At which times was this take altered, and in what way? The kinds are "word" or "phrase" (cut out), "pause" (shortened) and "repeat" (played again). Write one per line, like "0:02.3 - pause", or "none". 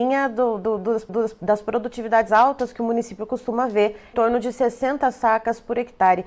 0:01.1 - repeat
0:02.3 - word
0:04.1 - word